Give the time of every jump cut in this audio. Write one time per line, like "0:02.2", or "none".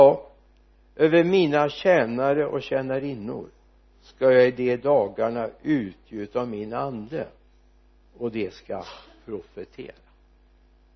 none